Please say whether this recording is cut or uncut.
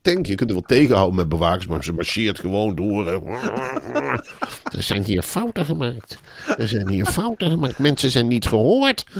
uncut